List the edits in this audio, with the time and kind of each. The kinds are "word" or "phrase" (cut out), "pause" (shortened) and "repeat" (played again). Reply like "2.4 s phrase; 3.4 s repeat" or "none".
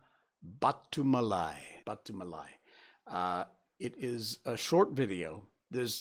1.8 s pause